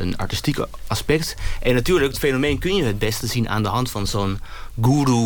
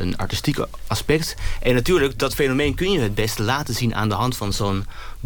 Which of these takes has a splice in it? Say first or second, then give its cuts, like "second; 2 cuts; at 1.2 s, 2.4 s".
first; 2 cuts; at 2.1 s, 3.2 s